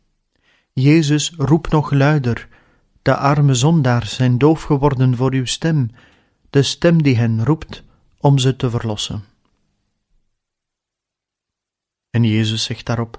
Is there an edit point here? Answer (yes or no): no